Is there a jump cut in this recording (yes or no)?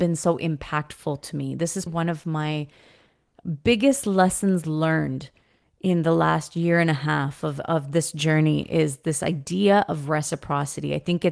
yes